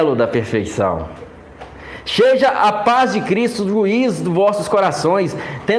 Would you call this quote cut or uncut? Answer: uncut